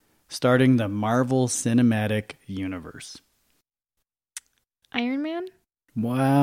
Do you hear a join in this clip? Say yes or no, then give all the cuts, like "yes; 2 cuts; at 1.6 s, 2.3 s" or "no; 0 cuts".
no; 0 cuts